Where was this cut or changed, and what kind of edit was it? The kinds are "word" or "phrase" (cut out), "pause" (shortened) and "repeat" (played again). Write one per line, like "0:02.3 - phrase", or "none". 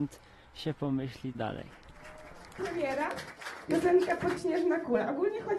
0:01.3 - word
0:02.6 - phrase
0:04.4 - word

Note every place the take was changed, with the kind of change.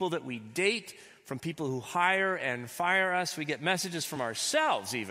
none

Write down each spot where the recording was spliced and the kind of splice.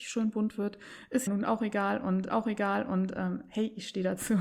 0:01.3 - word
0:02.3 - repeat

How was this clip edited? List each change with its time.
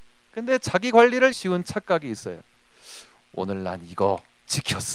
0:01.3 - phrase

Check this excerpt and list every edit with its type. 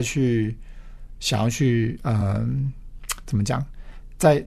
none

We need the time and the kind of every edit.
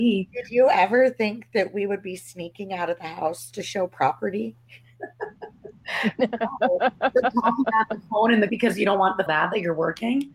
0:08.5 - word
0:09.3 - phrase

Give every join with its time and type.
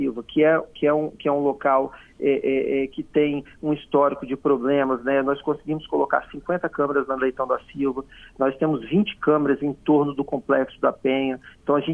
none

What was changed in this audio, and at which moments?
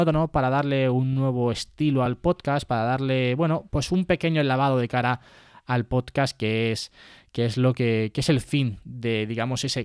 none

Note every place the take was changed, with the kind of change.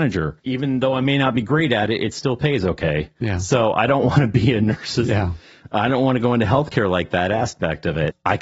none

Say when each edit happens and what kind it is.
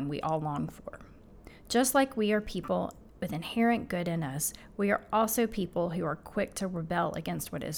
none

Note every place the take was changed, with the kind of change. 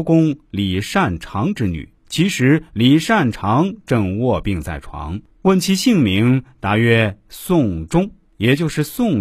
0:02.0 - pause
0:05.3 - pause

